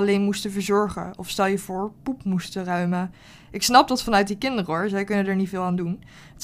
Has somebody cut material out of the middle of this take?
no; 0 cuts

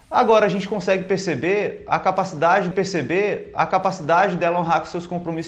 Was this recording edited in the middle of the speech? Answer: yes; 1 cut; at 2.7 s

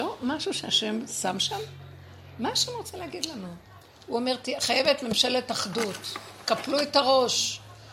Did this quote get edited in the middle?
no; 0 cuts

